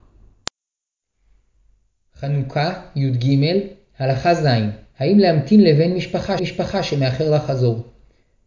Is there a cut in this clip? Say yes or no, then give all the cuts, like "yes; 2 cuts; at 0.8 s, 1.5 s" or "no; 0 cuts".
yes; 1 cut; at 6.4 s